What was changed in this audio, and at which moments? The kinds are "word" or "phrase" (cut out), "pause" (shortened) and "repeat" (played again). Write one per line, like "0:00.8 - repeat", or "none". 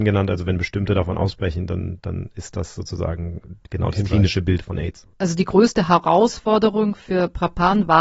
0:05.1 - pause